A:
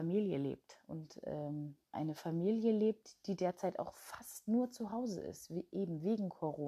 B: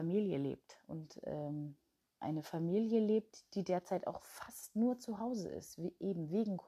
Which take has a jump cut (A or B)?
A